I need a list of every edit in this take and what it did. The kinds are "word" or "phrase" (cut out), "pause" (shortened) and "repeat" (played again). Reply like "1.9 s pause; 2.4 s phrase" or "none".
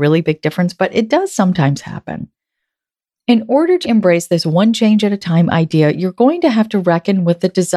3.8 s word